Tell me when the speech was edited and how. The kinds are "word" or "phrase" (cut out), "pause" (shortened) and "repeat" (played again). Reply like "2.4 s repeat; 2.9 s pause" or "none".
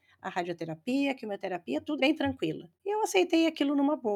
2.0 s word; 2.7 s pause